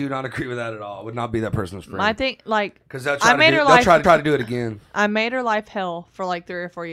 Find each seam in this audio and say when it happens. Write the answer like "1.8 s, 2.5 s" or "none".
4.0 s